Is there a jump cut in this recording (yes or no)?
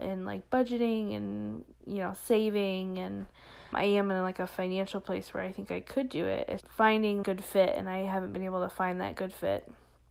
yes